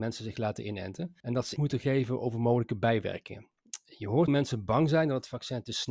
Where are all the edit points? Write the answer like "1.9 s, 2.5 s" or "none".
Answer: 1.2 s, 1.6 s, 4.3 s